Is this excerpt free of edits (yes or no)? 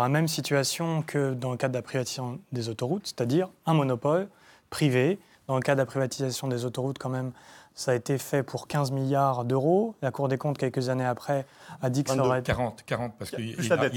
yes